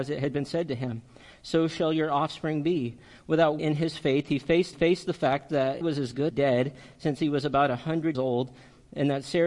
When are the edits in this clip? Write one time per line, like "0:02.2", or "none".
0:03.6
0:04.7
0:05.8
0:06.3
0:08.1